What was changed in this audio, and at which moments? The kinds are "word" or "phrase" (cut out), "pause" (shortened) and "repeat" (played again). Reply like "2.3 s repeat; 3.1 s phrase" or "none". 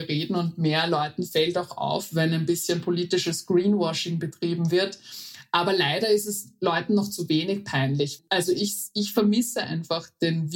none